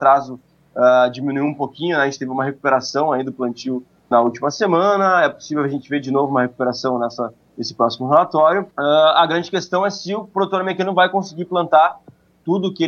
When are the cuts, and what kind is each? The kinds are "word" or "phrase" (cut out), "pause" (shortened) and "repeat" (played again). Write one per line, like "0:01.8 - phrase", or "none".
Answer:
0:04.1 - word
0:08.7 - pause

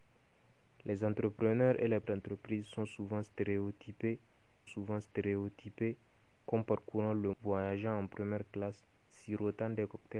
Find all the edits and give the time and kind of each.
0:02.0 - word
0:04.7 - repeat
0:07.3 - word

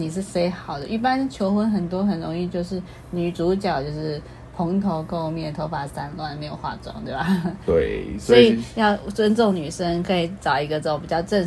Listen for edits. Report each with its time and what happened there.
none

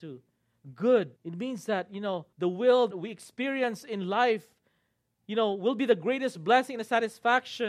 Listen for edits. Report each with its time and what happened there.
0:01.2 - pause
0:02.3 - pause
0:02.9 - word

